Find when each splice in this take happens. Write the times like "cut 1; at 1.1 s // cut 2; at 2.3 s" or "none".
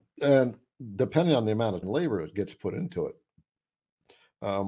cut 1; at 1.8 s